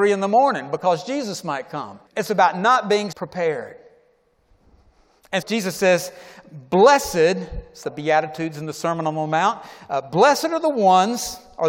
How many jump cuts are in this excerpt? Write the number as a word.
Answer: four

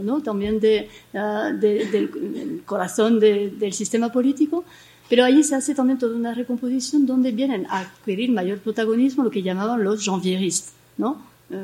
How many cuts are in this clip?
zero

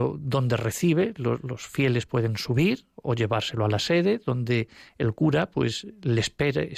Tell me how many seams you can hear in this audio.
zero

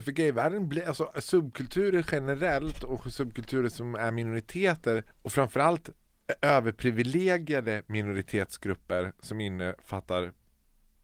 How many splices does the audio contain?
one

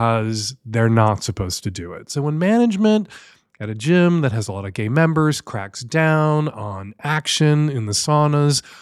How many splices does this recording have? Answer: zero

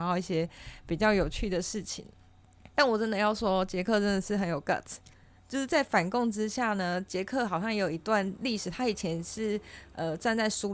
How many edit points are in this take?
zero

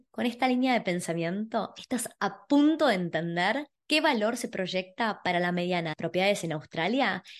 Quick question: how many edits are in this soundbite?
one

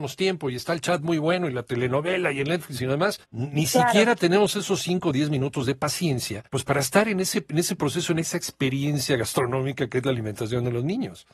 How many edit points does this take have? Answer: two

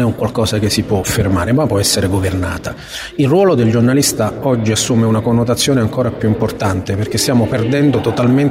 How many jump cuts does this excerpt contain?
zero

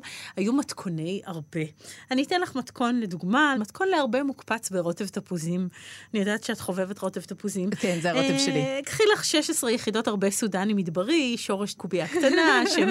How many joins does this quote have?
two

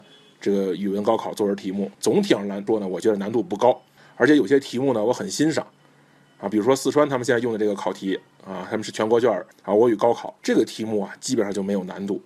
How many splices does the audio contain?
three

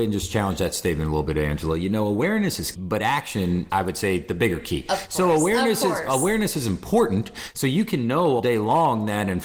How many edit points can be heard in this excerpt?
three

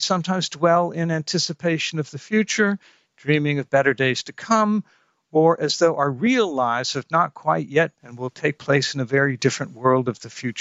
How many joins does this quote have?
one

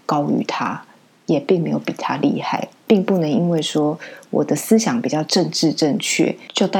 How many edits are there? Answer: zero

